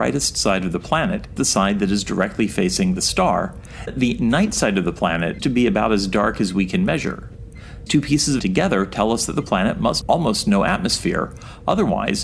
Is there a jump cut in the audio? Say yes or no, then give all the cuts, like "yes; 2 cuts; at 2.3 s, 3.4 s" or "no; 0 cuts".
yes; 6 cuts; at 1.4 s, 3.9 s, 5.4 s, 7.9 s, 8.4 s, 10.0 s